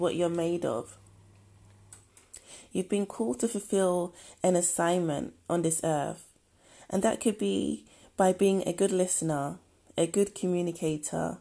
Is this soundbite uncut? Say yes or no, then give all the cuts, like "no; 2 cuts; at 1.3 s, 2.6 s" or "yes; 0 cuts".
yes; 0 cuts